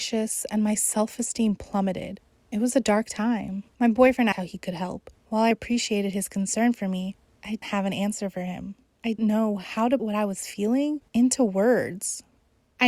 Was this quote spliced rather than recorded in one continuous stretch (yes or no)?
yes